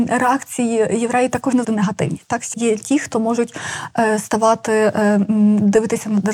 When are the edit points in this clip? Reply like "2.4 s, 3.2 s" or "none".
1.6 s, 2.5 s